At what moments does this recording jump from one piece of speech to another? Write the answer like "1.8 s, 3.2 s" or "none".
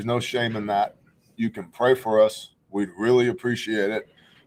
none